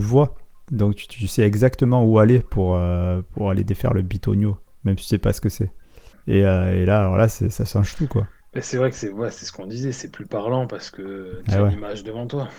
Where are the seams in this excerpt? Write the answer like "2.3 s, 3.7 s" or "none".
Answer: none